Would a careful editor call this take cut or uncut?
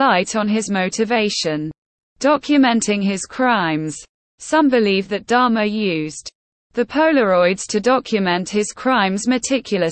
uncut